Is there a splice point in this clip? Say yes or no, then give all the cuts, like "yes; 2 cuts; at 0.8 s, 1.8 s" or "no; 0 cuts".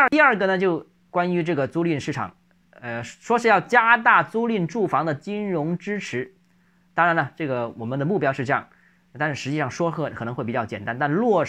no; 0 cuts